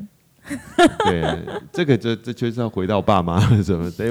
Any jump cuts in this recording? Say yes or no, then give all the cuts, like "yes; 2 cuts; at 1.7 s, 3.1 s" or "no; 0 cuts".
no; 0 cuts